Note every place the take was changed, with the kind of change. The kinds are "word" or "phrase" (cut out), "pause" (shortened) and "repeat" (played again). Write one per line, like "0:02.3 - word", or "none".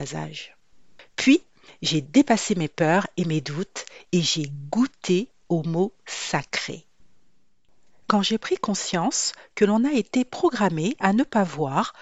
none